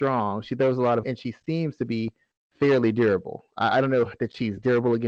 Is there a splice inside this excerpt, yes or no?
yes